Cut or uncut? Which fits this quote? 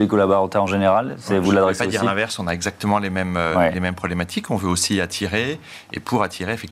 uncut